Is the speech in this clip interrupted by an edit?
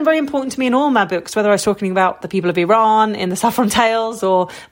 no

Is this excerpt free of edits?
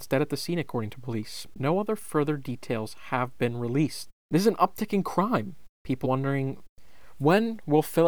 no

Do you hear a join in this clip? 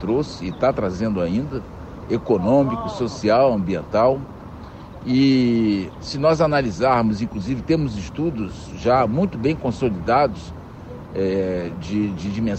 no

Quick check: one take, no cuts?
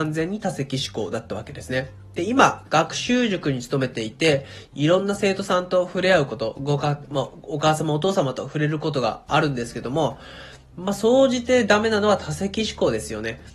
yes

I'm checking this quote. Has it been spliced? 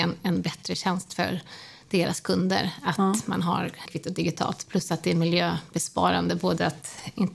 yes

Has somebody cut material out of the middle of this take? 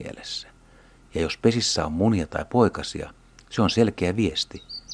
no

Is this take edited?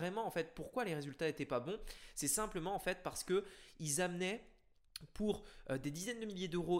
no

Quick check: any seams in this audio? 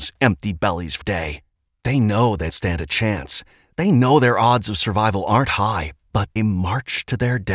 yes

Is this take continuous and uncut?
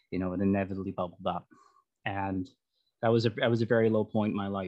yes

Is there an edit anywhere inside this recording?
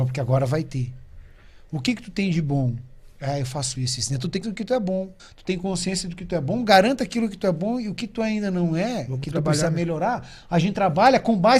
yes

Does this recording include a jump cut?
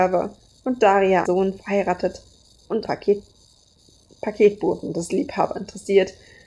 yes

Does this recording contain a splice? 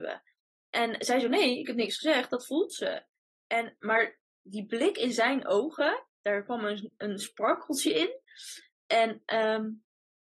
no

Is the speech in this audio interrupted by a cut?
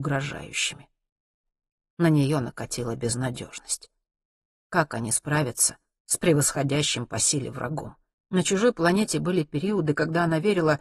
yes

